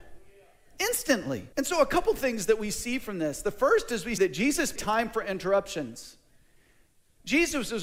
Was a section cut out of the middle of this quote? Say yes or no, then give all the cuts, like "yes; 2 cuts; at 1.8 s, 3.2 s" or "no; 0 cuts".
yes; 3 cuts; at 1.5 s, 4.2 s, 4.8 s